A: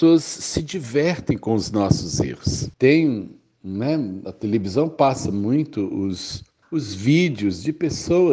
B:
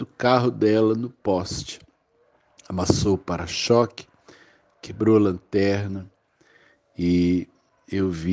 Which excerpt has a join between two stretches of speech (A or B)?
A